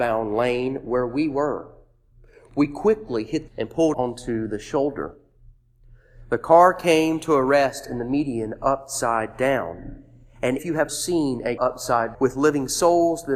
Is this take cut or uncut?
cut